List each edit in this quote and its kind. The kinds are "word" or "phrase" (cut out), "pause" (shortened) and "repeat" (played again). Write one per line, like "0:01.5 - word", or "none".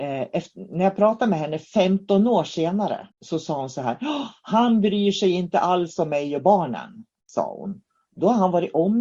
0:03.1 - pause